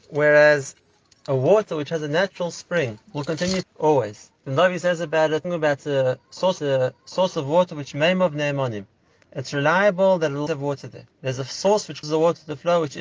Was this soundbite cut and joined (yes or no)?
yes